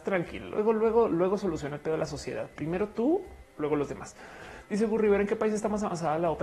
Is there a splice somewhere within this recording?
no; 0 cuts

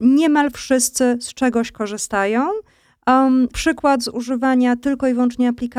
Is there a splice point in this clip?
yes; 1 cut; at 3.5 s

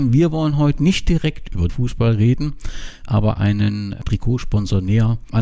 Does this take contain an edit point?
yes; 1 cut; at 1.7 s

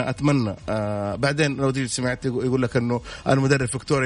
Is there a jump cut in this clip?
no; 0 cuts

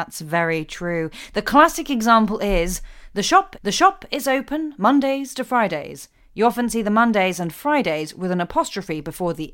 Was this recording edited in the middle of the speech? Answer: yes; 1 cut; at 3.6 s

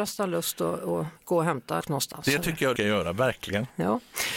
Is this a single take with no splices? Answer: no; 3 cuts; at 1.2 s, 1.8 s, 2.8 s

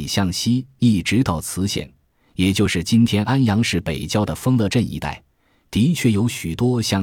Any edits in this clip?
no; 0 cuts

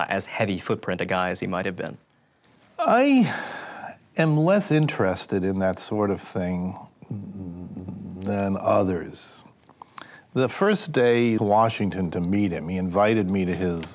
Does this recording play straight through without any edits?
no; 1 cut; at 11.4 s

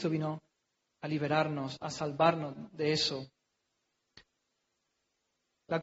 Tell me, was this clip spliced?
no; 0 cuts

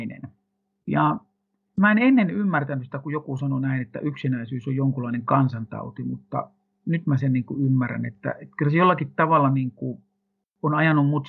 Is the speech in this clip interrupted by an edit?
no; 0 cuts

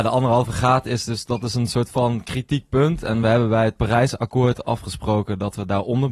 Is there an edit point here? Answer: no; 0 cuts

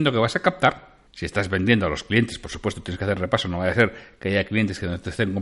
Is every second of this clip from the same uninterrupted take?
no; 1 cut; at 1.1 s

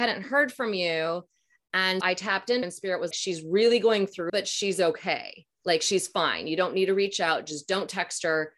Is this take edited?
yes; 5 cuts; at 2.0 s, 2.6 s, 3.1 s, 4.3 s, 5.5 s

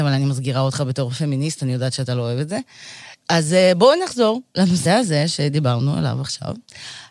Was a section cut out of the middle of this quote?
no; 0 cuts

